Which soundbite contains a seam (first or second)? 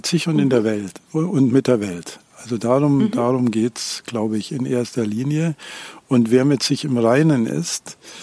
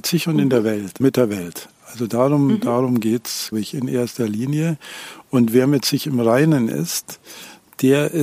second